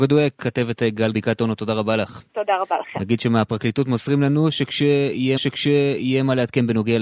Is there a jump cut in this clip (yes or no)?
yes